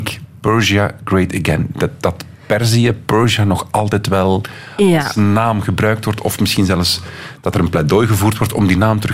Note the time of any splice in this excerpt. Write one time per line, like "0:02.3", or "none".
none

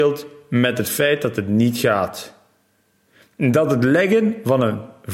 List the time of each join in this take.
none

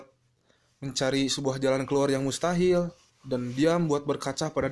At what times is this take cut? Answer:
0:03.1

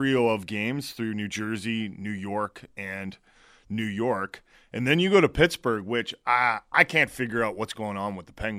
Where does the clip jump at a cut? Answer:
none

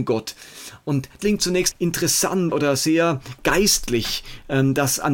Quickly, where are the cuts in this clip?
0:01.2
0:01.7
0:02.5

